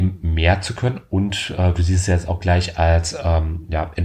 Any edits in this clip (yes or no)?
no